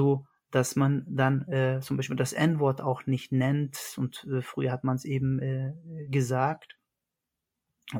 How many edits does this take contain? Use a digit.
0